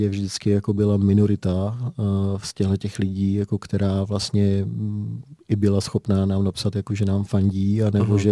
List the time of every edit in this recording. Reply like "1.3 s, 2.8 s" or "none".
none